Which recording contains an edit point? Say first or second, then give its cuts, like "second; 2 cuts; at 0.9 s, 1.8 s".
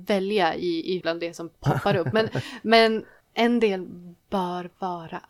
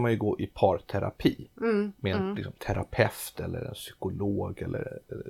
first; 3 cuts; at 1.0 s, 3.2 s, 4.2 s